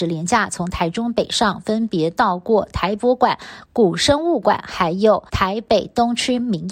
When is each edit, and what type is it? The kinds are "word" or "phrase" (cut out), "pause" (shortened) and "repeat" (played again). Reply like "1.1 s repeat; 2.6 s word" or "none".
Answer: 5.3 s pause